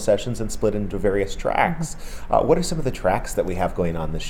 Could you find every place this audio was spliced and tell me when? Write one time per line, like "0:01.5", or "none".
none

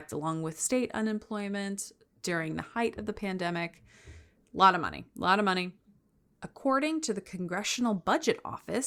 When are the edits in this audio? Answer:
none

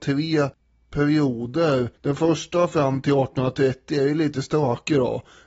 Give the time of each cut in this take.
0:02.0

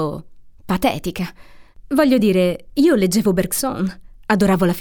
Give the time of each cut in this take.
none

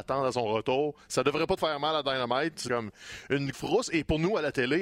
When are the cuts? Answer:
0:01.6
0:02.7
0:03.5

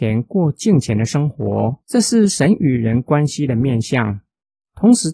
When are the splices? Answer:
0:01.8

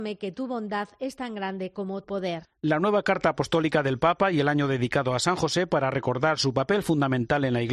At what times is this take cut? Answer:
0:02.0

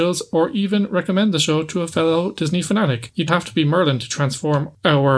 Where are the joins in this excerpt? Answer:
0:03.3

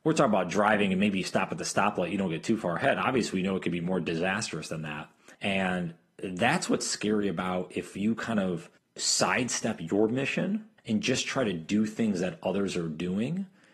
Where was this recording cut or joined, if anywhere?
0:05.3
0:08.8
0:10.8

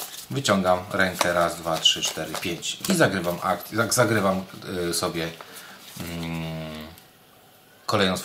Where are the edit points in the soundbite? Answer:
none

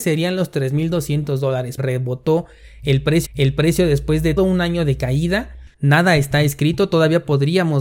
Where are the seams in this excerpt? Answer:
0:01.8
0:03.3
0:04.4
0:05.7

